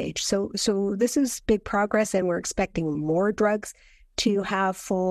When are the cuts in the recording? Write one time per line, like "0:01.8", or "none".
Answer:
none